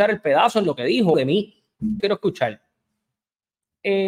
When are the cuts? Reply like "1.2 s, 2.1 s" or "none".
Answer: 1.1 s, 2.0 s